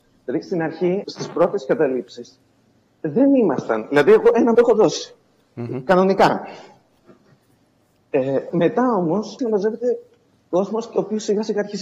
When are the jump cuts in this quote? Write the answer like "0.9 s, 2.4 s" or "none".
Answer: 1.0 s, 4.5 s, 8.5 s, 9.4 s